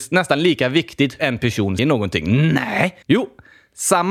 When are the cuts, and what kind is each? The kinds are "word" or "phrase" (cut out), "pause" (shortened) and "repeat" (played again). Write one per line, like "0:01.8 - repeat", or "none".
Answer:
0:01.2 - word
0:01.8 - word
0:03.0 - pause